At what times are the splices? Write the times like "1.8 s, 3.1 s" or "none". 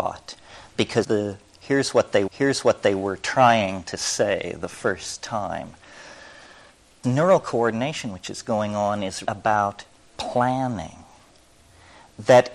1.0 s, 2.3 s, 7.0 s, 9.2 s